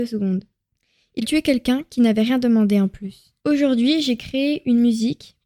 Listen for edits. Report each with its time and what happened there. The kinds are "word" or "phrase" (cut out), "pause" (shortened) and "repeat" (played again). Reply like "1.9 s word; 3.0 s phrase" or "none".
1.2 s word; 3.4 s pause